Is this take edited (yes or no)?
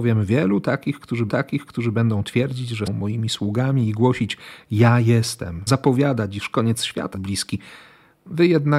yes